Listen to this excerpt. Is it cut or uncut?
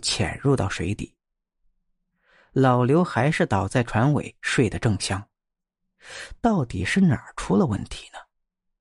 uncut